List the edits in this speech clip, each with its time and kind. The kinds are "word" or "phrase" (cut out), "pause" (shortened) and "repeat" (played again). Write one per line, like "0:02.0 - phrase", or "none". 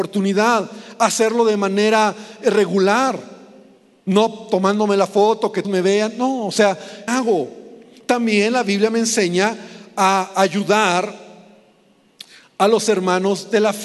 0:05.6 - word
0:07.1 - phrase